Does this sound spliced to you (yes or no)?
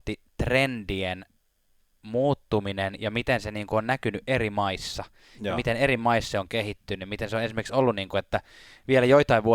no